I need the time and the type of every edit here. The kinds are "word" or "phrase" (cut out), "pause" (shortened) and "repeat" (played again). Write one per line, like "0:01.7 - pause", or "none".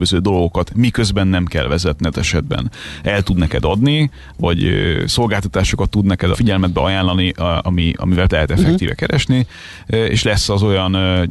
0:02.1 - word
0:06.3 - word
0:07.6 - word
0:08.3 - word